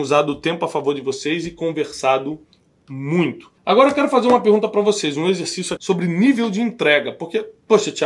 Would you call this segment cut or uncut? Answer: cut